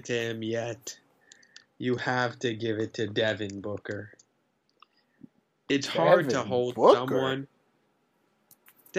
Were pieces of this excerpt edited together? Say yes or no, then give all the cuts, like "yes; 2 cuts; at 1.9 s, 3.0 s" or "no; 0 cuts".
no; 0 cuts